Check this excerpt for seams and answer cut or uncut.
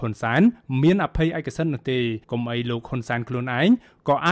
cut